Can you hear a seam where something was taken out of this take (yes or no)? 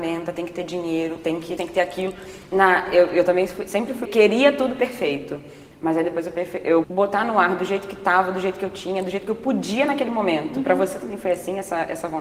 yes